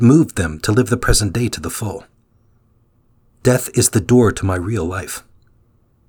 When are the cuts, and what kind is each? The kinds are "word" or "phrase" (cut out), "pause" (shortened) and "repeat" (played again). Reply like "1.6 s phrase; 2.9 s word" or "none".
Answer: none